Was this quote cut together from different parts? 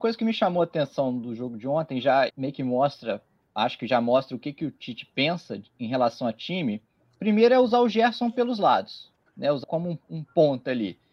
yes; 2 cuts; at 2.3 s, 9.6 s

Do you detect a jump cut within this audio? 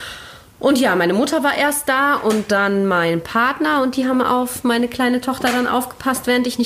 no; 0 cuts

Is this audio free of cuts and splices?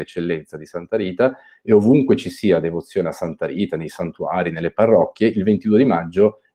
yes; 0 cuts

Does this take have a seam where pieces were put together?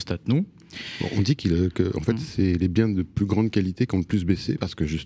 no; 0 cuts

